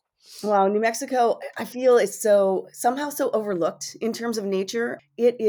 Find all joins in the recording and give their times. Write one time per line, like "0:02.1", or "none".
none